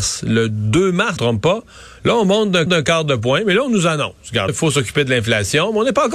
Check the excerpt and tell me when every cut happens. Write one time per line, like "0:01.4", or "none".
0:01.2
0:02.7
0:04.5